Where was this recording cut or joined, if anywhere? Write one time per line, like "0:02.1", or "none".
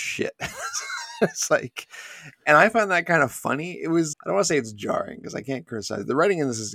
0:04.1